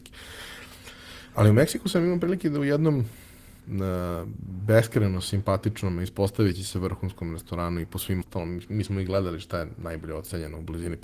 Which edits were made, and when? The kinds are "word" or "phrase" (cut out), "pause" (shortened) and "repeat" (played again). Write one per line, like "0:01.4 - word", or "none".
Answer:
0:03.6 - pause
0:08.2 - phrase